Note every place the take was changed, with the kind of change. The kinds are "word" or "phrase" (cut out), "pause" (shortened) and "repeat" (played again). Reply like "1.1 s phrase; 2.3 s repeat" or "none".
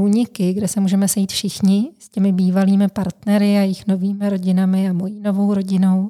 none